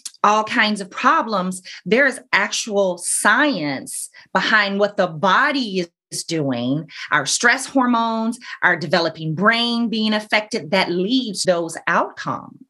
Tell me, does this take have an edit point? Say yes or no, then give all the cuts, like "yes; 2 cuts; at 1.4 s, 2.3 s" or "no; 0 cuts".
yes; 1 cut; at 11.4 s